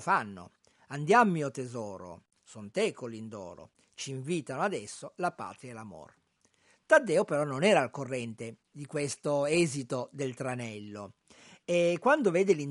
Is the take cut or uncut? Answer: uncut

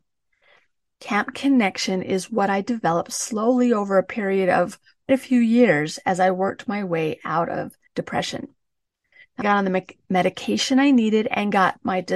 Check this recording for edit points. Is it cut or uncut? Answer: cut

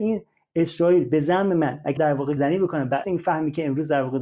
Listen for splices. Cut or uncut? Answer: cut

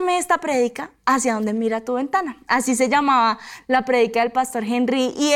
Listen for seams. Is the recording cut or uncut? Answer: uncut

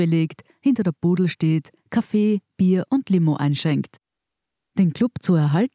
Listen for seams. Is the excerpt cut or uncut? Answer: uncut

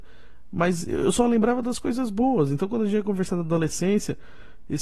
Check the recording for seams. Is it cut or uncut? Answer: uncut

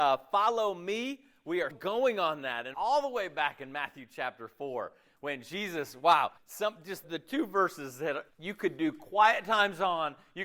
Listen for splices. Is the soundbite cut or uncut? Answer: cut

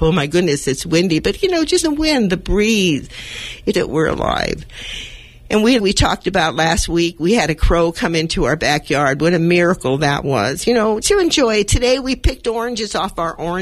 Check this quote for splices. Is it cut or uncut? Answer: cut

